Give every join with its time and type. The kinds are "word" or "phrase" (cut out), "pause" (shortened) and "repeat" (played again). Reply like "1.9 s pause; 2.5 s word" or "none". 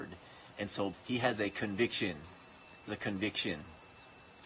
0.9 s word; 2.9 s word